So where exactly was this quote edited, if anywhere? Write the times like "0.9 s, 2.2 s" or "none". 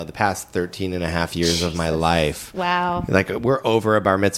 none